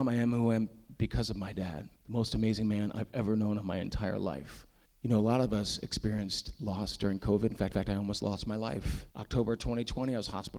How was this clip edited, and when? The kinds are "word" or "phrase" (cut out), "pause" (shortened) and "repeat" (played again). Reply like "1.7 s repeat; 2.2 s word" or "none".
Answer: 2.0 s pause; 4.9 s pause; 7.7 s repeat; 9.1 s pause